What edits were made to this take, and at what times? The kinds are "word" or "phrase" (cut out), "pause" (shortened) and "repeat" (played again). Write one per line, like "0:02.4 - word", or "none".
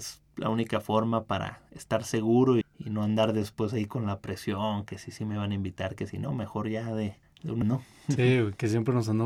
0:02.6 - word
0:07.2 - pause
0:07.6 - word